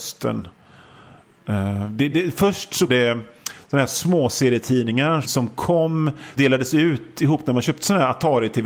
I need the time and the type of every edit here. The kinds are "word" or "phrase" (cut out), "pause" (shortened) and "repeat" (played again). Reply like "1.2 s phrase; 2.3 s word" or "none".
2.1 s word; 2.9 s word; 5.2 s word; 6.4 s word